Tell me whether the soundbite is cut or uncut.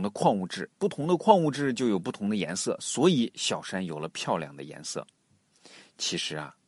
uncut